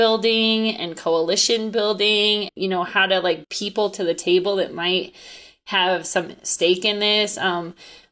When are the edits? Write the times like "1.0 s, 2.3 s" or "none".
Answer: 2.5 s, 3.4 s